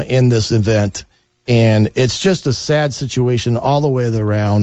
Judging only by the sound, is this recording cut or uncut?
uncut